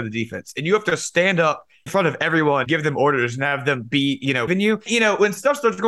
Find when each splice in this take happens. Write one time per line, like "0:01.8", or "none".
0:01.9
0:02.7
0:04.5
0:04.9